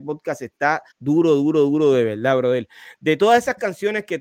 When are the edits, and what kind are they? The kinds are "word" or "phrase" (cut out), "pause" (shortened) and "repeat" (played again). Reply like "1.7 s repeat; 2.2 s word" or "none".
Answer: 0.9 s pause